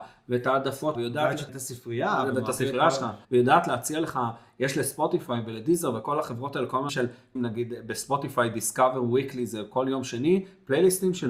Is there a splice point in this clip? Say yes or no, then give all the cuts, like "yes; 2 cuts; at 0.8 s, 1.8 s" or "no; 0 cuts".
yes; 5 cuts; at 0.9 s, 1.5 s, 3.2 s, 6.9 s, 7.4 s